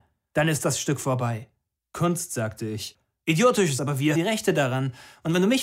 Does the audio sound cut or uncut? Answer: cut